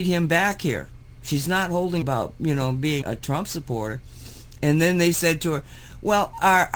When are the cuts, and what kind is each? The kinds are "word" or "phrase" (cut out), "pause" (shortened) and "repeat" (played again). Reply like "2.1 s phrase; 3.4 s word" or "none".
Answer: 2.0 s phrase; 3.0 s word